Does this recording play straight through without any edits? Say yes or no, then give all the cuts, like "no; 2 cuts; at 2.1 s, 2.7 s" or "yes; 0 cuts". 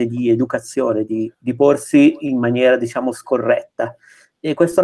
no; 1 cut; at 1.3 s